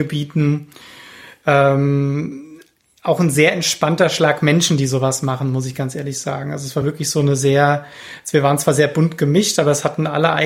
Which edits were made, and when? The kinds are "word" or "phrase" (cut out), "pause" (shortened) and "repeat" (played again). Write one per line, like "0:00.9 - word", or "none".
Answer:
none